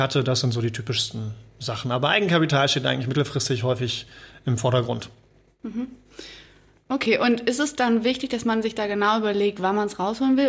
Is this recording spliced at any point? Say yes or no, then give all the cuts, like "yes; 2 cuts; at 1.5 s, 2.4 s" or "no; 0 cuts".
no; 0 cuts